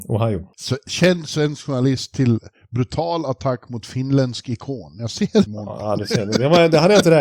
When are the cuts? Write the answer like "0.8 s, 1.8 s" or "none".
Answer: 5.5 s